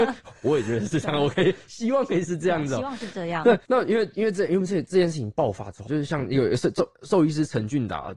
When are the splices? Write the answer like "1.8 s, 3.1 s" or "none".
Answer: 5.9 s